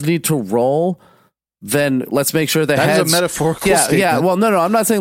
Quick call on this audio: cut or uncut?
uncut